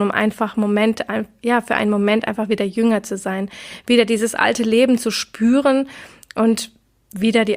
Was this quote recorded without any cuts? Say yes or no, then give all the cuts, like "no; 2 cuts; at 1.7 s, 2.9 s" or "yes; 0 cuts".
yes; 0 cuts